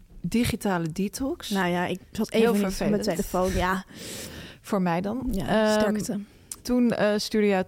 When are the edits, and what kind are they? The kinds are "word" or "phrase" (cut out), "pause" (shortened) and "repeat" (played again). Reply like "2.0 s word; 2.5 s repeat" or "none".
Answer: 6.6 s pause